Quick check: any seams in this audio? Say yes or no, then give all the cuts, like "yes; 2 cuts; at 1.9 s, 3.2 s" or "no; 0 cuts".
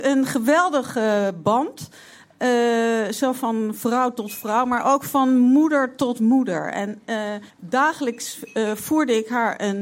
yes; 1 cut; at 7.5 s